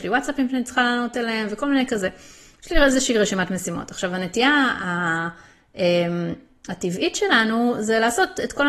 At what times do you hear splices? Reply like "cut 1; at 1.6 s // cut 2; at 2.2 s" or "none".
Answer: none